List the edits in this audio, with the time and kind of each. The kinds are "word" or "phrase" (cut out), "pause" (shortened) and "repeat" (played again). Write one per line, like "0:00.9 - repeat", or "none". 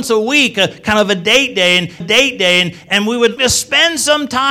0:02.0 - repeat
0:03.4 - word